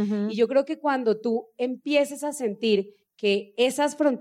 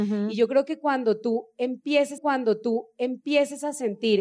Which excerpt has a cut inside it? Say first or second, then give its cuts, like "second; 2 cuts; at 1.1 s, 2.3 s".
second; 1 cut; at 2.2 s